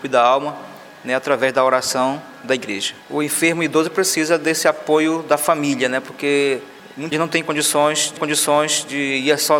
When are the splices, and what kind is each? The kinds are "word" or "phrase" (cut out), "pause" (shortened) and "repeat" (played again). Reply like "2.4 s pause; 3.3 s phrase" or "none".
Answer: 3.0 s pause; 7.1 s word; 8.2 s repeat